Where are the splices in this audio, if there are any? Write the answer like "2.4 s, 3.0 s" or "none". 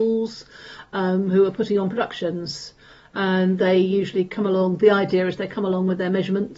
none

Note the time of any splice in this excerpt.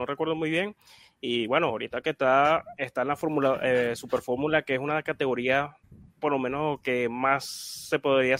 none

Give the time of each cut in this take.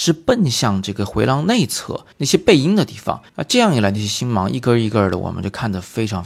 2.1 s, 3.3 s

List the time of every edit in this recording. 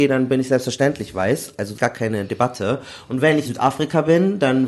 1.8 s, 3.4 s

